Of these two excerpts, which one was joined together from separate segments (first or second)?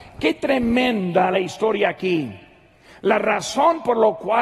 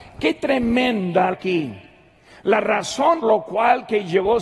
second